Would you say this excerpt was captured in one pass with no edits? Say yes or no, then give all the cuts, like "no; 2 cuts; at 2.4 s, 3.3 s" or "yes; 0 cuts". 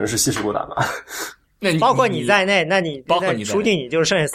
yes; 0 cuts